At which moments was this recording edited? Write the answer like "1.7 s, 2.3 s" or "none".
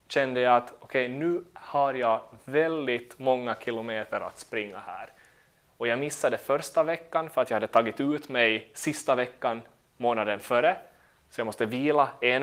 none